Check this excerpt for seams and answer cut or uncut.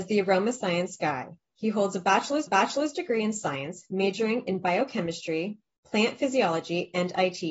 cut